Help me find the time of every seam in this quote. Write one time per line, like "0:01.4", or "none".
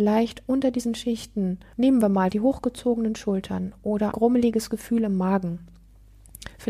0:01.7
0:02.3
0:04.1